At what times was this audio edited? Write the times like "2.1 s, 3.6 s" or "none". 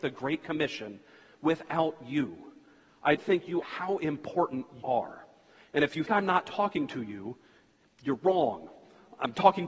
3.2 s, 3.6 s, 4.8 s, 6.1 s